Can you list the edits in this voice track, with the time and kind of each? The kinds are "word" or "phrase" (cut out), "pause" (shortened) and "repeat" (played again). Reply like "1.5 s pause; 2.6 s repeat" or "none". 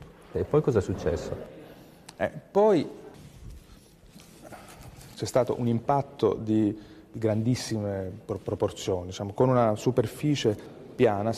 none